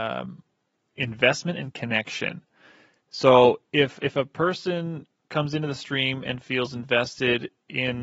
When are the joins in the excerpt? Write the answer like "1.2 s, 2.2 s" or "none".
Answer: none